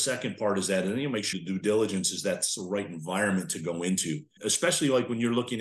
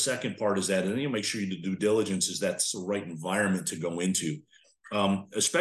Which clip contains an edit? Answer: first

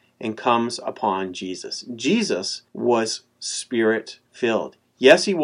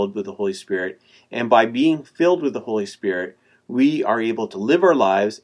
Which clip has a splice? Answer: first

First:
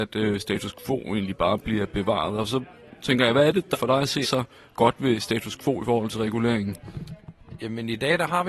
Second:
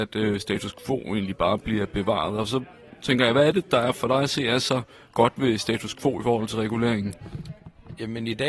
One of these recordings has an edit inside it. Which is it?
first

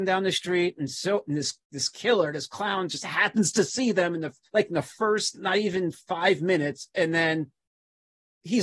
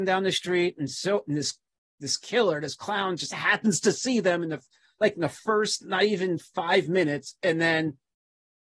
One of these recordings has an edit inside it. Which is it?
first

